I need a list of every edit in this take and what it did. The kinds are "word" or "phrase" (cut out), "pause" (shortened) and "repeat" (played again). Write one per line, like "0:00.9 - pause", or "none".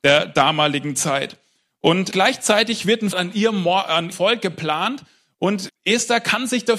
0:02.1 - word
0:03.1 - word
0:04.1 - word
0:05.7 - word